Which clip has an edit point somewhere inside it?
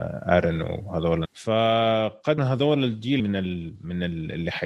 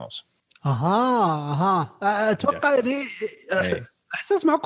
first; 3 cuts; at 1.2 s, 2.4 s, 3.2 s

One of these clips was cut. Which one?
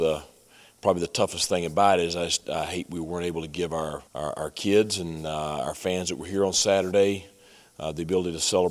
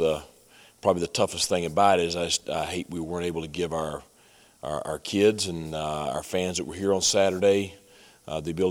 first; 1 cut; at 4.1 s

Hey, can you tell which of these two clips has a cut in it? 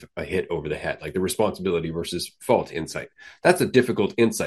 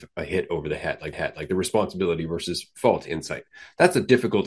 second; 1 cut; at 1.1 s

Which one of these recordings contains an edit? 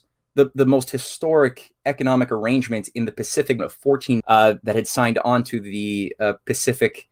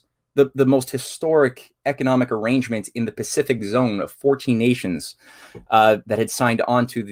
first; 2 cuts; at 3.6 s, 4.2 s

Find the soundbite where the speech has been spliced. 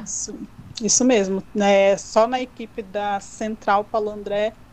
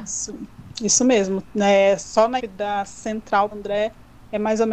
second; 2 cuts; at 2.4 s, 3.5 s

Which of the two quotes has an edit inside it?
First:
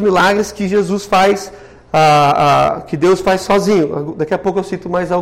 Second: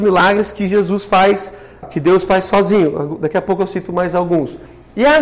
second; 1 cut; at 1.8 s

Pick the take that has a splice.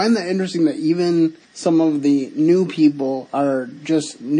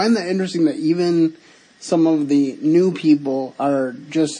first; 1 cut; at 1.4 s

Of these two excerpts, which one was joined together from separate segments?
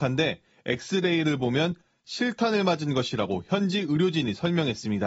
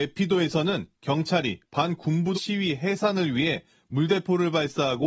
second; 1 cut; at 2.3 s

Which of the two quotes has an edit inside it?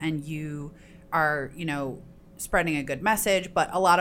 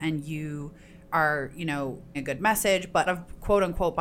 second; 2 cuts; at 2.1 s, 3.1 s

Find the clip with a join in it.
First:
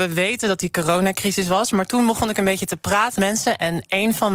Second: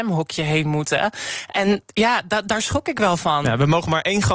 first; 1 cut; at 3.2 s

